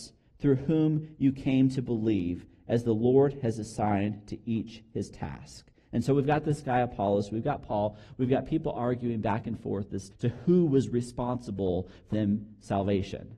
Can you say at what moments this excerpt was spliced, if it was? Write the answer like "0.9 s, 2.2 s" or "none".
10.1 s, 12.1 s